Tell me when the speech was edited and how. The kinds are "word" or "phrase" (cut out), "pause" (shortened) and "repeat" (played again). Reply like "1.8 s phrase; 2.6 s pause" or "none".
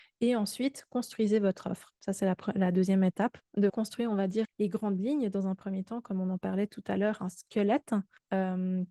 3.7 s word; 4.4 s word